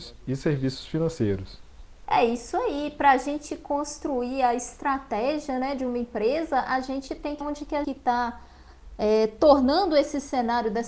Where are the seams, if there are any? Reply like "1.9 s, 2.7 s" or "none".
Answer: 7.4 s, 7.8 s